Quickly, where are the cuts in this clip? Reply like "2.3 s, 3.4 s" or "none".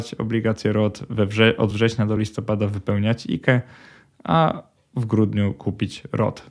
none